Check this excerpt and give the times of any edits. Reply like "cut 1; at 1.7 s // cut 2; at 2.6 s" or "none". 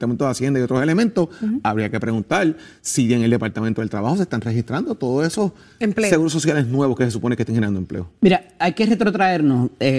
none